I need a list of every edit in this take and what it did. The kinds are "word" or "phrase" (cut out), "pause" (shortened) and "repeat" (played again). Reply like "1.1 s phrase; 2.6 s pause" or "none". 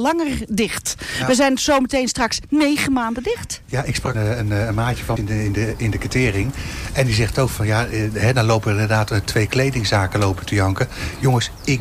4.1 s word; 5.2 s phrase